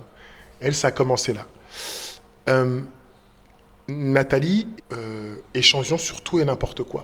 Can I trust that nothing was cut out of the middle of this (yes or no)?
no